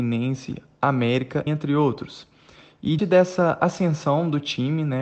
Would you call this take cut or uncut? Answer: cut